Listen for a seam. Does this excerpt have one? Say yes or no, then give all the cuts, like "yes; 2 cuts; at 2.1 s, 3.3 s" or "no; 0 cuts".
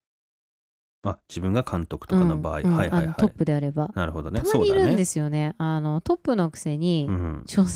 no; 0 cuts